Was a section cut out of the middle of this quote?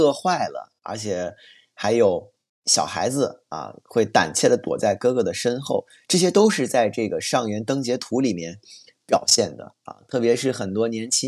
no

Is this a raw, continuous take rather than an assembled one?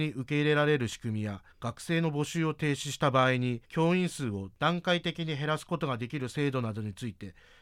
no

